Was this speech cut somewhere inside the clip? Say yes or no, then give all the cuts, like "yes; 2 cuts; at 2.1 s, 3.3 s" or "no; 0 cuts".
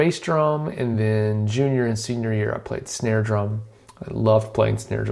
no; 0 cuts